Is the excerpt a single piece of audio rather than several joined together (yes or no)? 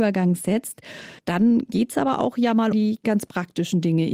no